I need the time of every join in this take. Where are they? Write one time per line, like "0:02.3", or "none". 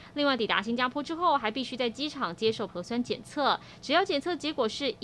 0:02.7

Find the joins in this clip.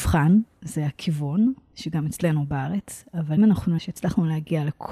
0:03.4
0:03.8

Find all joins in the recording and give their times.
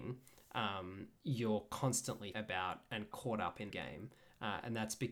0:01.2
0:02.3
0:03.1
0:03.7

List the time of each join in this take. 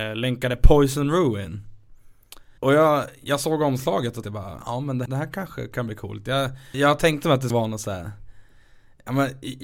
0:02.6
0:04.2
0:05.1
0:06.7
0:07.5

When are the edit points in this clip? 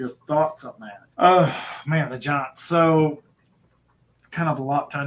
0:01.1

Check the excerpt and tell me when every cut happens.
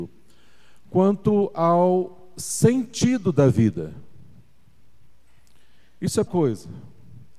0:06.3

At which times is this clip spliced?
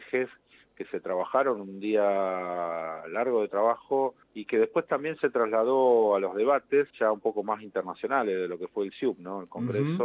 0:04.2
0:06.9

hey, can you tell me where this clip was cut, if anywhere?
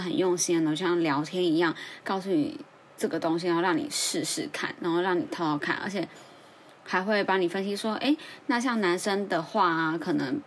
none

